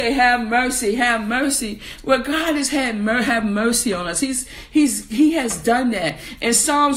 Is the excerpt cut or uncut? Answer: uncut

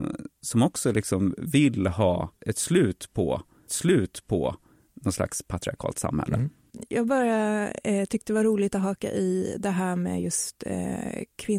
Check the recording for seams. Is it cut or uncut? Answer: cut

